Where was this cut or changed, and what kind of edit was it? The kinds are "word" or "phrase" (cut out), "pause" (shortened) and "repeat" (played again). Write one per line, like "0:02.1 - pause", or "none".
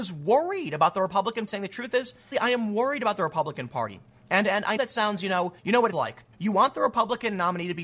0:01.5 - word
0:02.3 - word
0:04.8 - word
0:05.6 - pause
0:05.9 - word
0:06.3 - pause

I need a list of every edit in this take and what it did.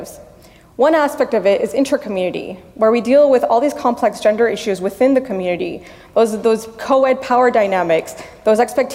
none

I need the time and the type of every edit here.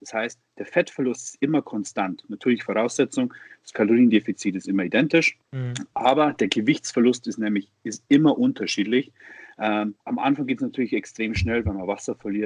0:05.4 - pause
0:10.0 - pause

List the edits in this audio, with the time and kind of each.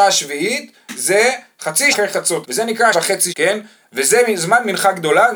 0:01.9 - word
0:02.4 - word
0:02.9 - word
0:03.3 - word

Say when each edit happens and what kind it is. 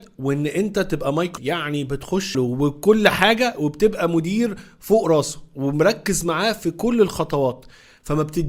0:01.4 - word
0:02.3 - phrase

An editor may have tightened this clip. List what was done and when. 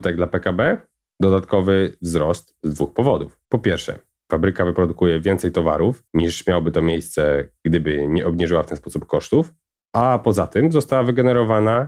0:03.5 - pause
0:06.1 - pause

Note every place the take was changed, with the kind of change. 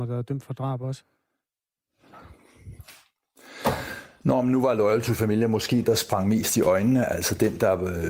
0:05.8 - word

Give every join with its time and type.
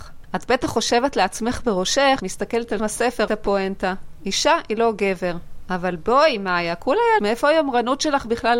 0:02.2 - word
0:02.8 - word
0:03.3 - phrase
0:07.2 - word

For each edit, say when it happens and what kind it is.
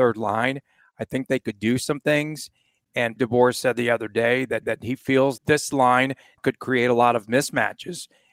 0:03.2 - word
0:04.6 - repeat
0:05.4 - word
0:06.4 - word

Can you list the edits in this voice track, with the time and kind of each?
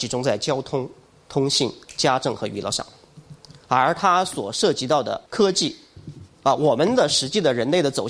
0:05.3 - pause

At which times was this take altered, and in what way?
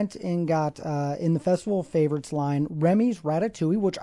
none

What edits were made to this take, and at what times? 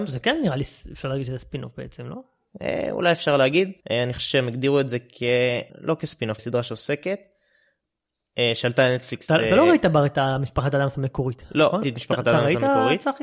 0:03.8 - pause
0:05.7 - pause
0:06.4 - word
0:11.8 - word

